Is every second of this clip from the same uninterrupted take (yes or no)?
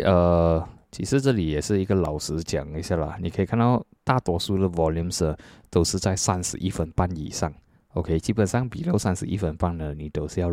yes